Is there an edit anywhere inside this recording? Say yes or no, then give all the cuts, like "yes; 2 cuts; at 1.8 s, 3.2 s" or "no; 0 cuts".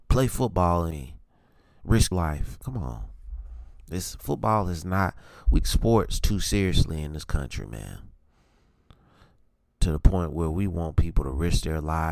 yes; 4 cuts; at 0.9 s, 2.1 s, 2.6 s, 5.6 s